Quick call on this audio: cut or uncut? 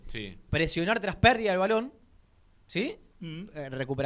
uncut